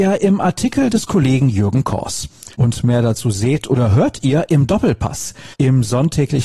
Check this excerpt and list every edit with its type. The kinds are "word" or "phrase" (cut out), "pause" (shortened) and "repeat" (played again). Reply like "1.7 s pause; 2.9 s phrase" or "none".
2.5 s pause; 5.5 s pause

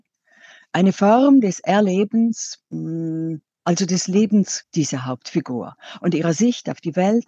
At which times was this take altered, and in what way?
2.6 s pause; 4.6 s word

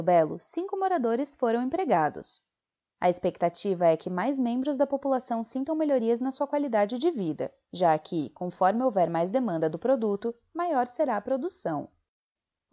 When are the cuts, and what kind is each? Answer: none

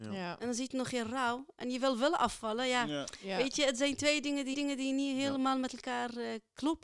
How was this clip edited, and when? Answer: 4.5 s repeat

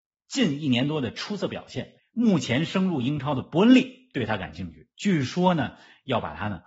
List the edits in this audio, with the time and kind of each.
2.0 s pause

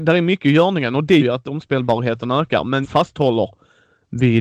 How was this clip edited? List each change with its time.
1.2 s word; 2.8 s word

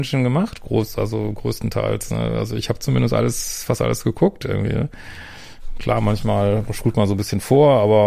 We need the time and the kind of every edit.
none

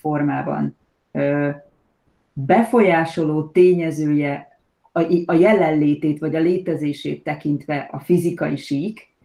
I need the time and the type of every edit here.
none

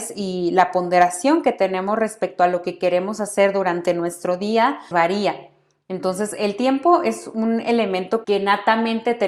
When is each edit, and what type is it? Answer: 4.9 s word; 8.2 s word

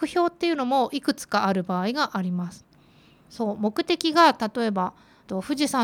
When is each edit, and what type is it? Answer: none

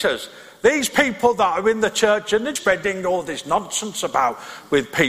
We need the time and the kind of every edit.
2.6 s word

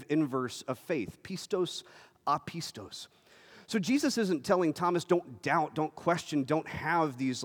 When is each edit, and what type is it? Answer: none

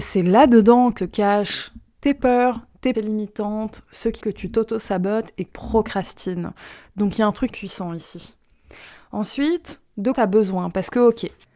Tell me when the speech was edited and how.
1.0 s word; 2.9 s word; 4.2 s word; 5.5 s word; 7.5 s word; 10.1 s word

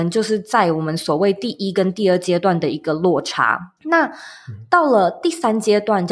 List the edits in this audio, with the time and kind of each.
3.8 s pause

